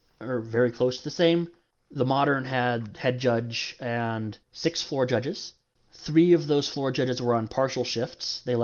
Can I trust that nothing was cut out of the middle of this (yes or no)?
no